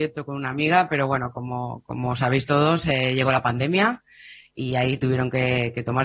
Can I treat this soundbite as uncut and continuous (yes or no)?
yes